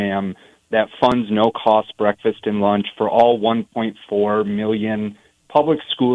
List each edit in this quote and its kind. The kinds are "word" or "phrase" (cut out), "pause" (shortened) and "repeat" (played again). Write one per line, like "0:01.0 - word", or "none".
none